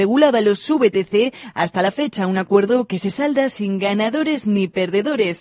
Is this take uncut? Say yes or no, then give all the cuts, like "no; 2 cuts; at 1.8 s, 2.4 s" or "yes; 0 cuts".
yes; 0 cuts